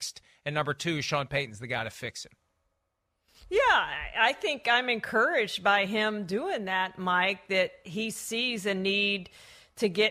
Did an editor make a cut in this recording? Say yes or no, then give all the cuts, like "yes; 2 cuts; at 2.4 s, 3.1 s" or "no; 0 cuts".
no; 0 cuts